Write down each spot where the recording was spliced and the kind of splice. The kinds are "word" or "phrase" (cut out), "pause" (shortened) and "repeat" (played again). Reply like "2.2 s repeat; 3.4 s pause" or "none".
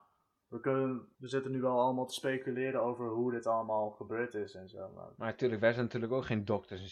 1.1 s pause